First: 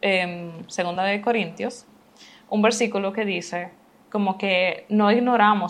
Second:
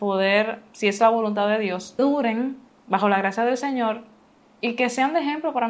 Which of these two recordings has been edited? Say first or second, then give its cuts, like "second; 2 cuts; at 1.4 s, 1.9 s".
second; 1 cut; at 2.0 s